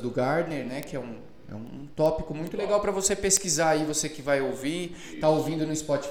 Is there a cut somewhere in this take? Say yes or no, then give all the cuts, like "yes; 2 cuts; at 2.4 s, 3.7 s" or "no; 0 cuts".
no; 0 cuts